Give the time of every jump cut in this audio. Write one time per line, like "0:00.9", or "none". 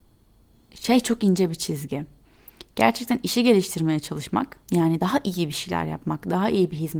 0:04.6